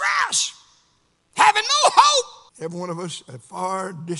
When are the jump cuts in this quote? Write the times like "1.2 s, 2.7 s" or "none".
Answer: 2.5 s